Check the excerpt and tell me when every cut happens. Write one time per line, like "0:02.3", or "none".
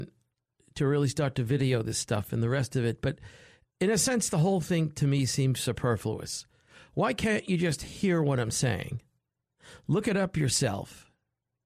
none